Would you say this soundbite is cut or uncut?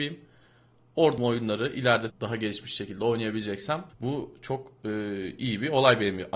cut